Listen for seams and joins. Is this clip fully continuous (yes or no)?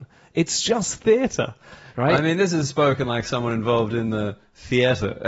yes